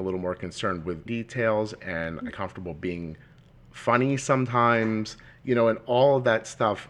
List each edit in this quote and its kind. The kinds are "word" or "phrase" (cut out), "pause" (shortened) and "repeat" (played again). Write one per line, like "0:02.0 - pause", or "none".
0:01.1 - word
0:02.3 - phrase
0:03.3 - pause

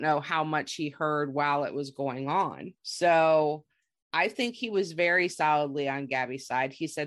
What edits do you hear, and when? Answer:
0:02.8 - pause

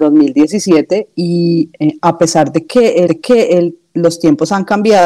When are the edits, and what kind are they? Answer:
0:03.1 - repeat

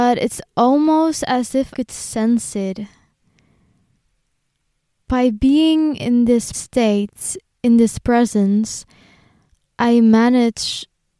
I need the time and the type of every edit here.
0:01.7 - word
0:06.5 - word

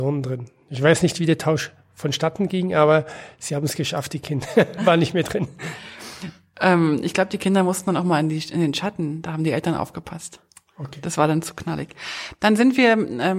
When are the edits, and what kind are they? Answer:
none

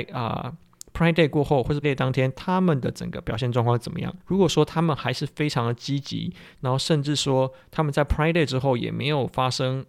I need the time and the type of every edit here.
0:01.8 - word
0:04.2 - pause

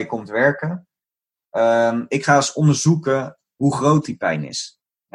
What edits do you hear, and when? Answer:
none

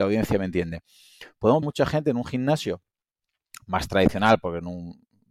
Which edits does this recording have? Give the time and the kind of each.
0:01.6 - phrase

